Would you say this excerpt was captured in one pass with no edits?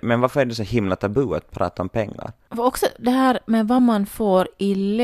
yes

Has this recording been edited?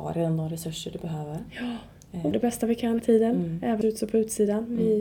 yes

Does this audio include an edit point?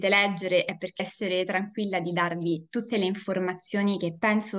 yes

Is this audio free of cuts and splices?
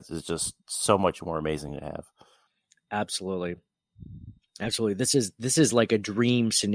yes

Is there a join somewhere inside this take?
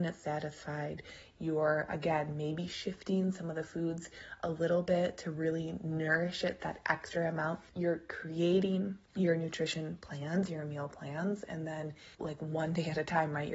yes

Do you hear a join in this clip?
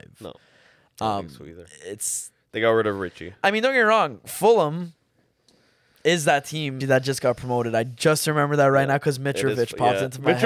yes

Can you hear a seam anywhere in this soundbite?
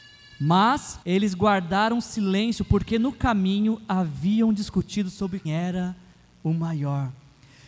yes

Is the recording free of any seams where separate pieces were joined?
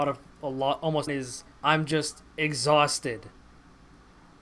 no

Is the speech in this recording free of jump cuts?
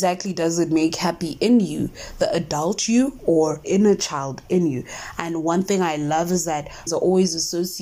no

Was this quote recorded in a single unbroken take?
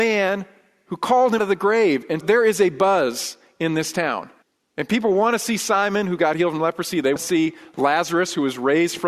no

